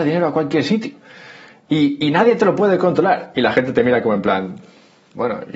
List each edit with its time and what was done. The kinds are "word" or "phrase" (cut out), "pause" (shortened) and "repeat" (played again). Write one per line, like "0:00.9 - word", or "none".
none